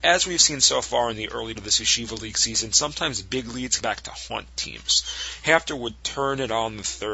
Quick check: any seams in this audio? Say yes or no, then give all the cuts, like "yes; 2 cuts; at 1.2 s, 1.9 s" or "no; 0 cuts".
yes; 2 cuts; at 1.6 s, 3.8 s